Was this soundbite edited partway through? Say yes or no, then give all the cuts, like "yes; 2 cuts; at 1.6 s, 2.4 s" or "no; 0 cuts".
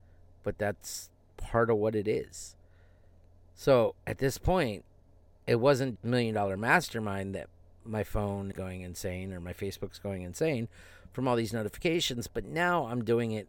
yes; 4 cuts; at 4.0 s, 5.1 s, 6.0 s, 8.5 s